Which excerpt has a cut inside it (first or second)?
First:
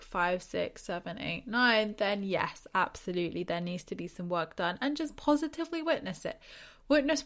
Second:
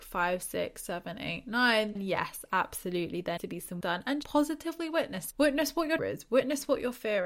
second